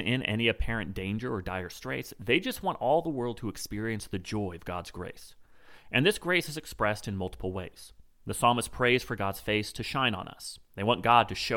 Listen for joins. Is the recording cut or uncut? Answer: uncut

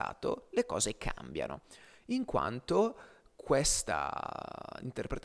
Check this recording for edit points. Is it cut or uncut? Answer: uncut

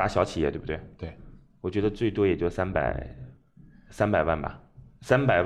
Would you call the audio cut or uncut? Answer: uncut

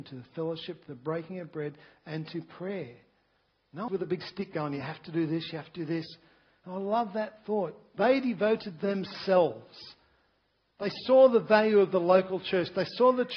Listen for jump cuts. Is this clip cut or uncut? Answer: cut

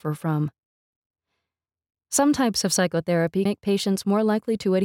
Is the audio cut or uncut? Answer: cut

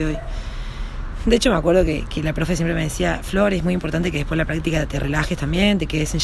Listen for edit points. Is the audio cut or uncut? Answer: uncut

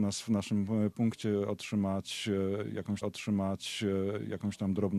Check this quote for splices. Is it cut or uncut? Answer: cut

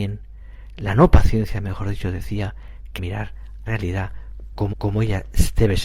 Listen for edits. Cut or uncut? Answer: cut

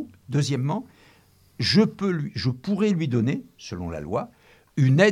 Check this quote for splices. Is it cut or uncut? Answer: uncut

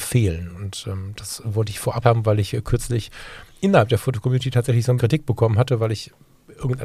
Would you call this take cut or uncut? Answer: cut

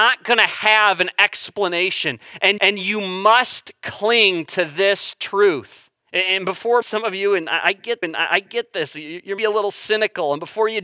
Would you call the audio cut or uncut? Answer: cut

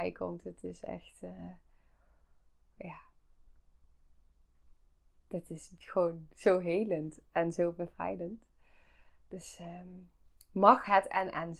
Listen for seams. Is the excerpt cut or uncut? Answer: uncut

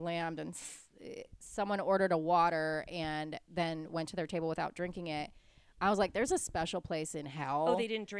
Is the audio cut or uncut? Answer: uncut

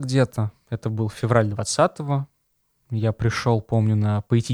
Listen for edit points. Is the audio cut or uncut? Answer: uncut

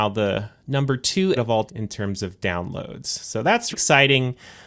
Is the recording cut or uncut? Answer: cut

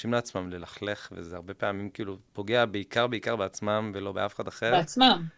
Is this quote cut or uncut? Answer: cut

